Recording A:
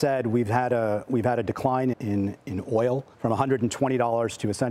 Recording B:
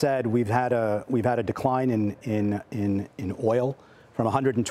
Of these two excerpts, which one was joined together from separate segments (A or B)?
A